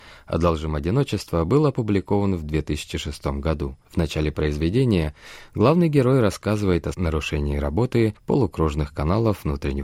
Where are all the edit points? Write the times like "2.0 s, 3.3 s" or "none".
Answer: 3.8 s, 6.9 s, 8.2 s